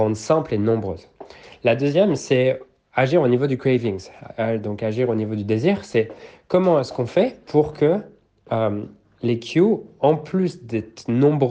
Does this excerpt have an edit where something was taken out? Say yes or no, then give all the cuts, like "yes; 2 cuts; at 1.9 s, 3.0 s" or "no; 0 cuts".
no; 0 cuts